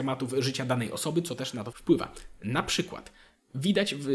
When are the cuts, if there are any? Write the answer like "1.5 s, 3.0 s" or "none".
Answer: 1.7 s